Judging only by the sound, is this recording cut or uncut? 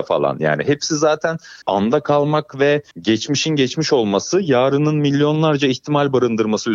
cut